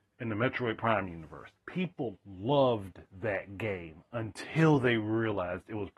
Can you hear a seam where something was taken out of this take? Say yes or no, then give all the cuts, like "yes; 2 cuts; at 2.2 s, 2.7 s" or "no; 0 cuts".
yes; 1 cut; at 1.6 s